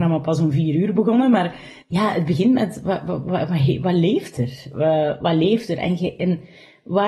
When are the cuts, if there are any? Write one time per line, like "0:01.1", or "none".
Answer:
0:01.8